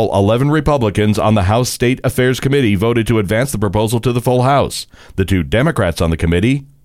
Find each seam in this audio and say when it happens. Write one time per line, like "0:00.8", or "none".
none

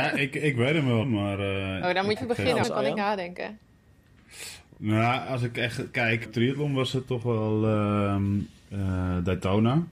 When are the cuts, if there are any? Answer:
0:01.0
0:02.2
0:02.6
0:06.3

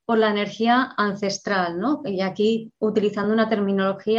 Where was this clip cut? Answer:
none

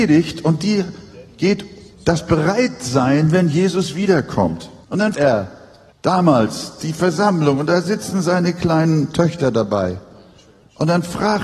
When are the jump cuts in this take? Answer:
0:01.9
0:04.8
0:05.1
0:05.9

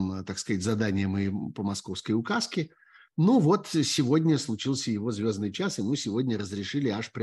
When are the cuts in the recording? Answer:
none

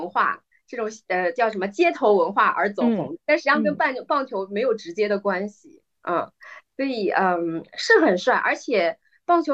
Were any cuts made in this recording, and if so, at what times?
0:03.2
0:06.0

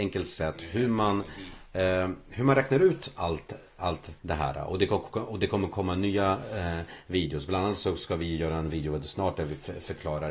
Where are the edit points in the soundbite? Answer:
0:04.2

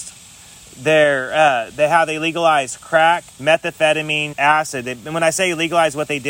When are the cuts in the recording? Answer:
0:03.3
0:04.3

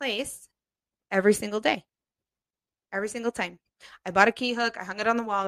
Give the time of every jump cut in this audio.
none

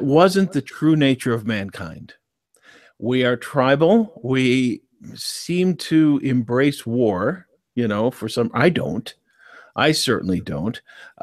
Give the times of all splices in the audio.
none

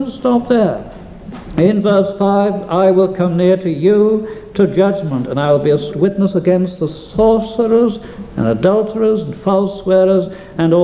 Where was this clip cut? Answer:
0:05.9

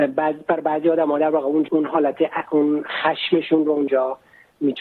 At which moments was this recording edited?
0:01.7

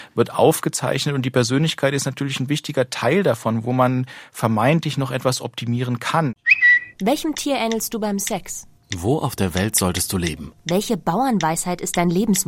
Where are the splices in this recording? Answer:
0:06.9

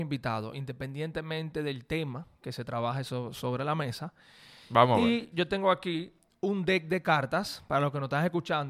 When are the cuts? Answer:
none

